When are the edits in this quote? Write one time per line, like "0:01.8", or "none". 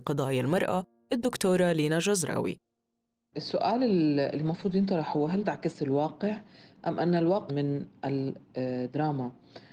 0:05.4
0:07.5